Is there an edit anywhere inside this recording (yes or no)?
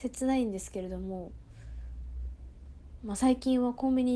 no